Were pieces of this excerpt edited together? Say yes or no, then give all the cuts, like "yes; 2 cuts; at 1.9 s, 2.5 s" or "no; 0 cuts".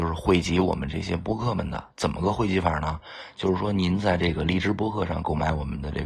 yes; 1 cut; at 1.9 s